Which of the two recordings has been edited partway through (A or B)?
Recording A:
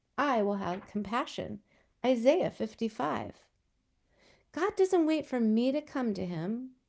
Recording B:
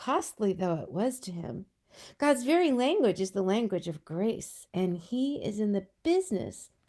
B